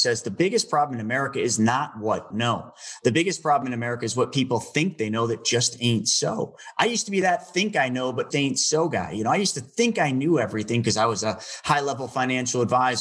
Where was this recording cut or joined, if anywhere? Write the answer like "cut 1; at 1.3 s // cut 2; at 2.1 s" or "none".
cut 1; at 2.3 s // cut 2; at 8.3 s